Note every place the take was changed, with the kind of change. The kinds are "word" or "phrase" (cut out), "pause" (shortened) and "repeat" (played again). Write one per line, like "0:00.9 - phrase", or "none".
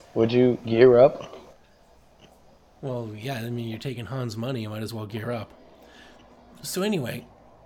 none